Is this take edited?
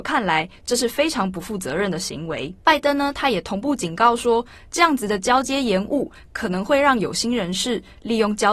yes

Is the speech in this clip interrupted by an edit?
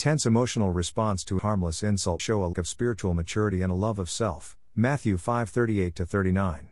yes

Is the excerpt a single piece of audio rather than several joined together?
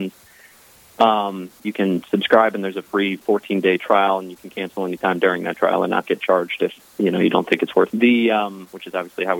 no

